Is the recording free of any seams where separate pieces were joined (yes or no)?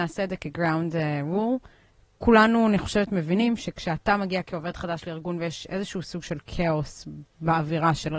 yes